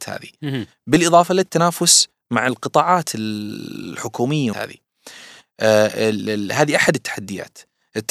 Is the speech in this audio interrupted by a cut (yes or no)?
yes